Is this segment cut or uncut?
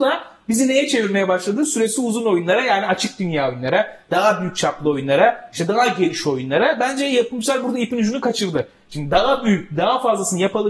uncut